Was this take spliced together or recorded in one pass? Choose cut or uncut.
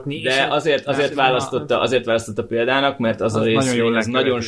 uncut